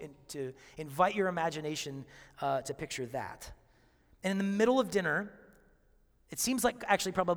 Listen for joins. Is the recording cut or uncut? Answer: uncut